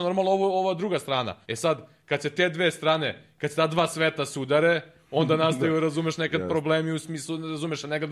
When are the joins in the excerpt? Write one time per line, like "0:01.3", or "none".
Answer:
0:01.4